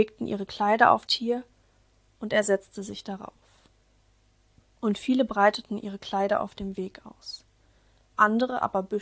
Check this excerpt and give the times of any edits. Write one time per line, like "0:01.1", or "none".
0:01.1